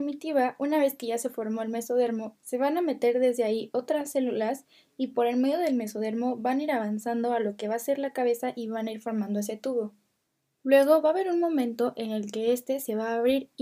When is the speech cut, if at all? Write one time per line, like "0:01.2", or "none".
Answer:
none